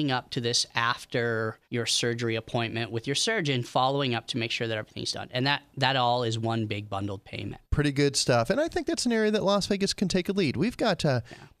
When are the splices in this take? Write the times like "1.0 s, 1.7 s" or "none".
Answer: 1.6 s, 7.6 s